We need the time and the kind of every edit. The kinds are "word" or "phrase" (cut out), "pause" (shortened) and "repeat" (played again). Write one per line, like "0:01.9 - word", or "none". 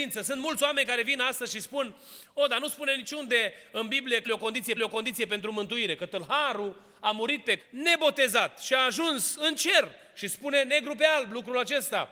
0:04.2 - word
0:04.8 - repeat
0:07.6 - word